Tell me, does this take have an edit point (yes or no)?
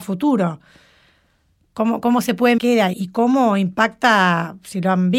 yes